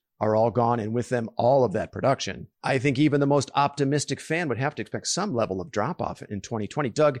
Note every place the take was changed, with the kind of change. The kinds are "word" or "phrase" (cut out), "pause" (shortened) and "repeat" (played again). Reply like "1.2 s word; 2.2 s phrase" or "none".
2.5 s pause